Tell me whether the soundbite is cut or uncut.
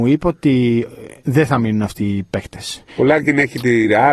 cut